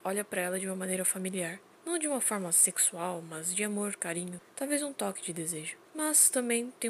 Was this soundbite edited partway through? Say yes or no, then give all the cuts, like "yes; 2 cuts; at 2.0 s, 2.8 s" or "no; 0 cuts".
yes; 3 cuts; at 1.8 s, 4.5 s, 5.9 s